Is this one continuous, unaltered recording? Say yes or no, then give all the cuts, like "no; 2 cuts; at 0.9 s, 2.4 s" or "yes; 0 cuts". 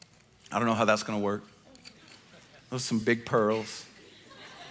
yes; 0 cuts